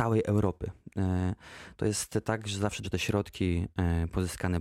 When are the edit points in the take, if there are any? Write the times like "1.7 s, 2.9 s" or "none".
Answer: 2.8 s

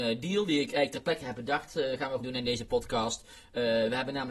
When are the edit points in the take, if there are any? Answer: 2.2 s

